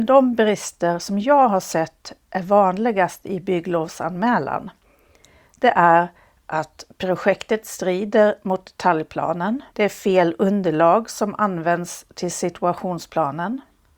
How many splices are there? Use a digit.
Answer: 1